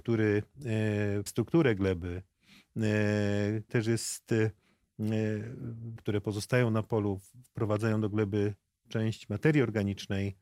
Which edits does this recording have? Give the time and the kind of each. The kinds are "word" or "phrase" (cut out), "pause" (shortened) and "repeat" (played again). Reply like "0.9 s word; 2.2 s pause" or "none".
1.3 s word; 3.7 s word; 6.0 s word; 8.9 s word